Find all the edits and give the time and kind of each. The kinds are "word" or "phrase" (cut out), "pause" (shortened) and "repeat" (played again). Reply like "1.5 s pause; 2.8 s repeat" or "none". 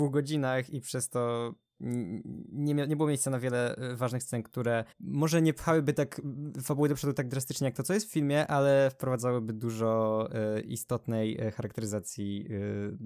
4.9 s pause